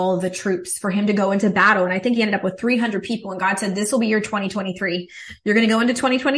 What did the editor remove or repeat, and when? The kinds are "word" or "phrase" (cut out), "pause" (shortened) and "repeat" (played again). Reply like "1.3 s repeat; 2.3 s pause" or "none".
none